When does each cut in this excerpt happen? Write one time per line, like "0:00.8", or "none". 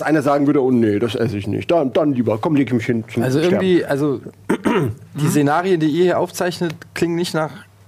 none